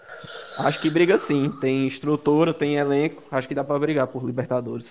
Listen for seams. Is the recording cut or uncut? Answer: uncut